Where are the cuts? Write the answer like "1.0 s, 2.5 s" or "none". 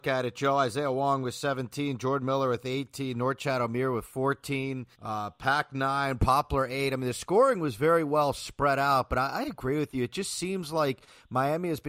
4.9 s